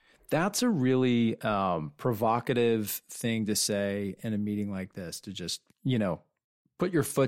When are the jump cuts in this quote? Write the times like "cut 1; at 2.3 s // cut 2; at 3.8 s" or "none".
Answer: cut 1; at 5.7 s